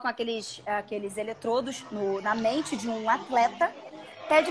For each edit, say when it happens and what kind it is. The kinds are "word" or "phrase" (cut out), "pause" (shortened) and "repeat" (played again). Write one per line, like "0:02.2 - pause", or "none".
none